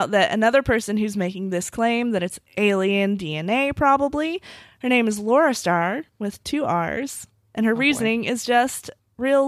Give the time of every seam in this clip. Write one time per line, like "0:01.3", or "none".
none